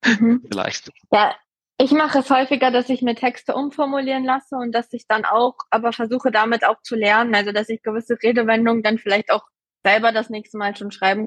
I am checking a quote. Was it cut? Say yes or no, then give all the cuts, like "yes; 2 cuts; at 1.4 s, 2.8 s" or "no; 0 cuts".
no; 0 cuts